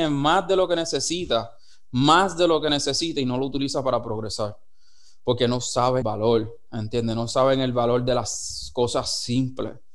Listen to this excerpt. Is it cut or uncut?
cut